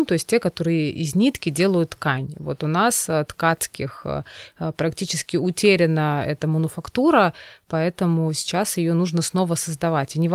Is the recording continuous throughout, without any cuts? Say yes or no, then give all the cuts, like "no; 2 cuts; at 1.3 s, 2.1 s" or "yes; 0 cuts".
yes; 0 cuts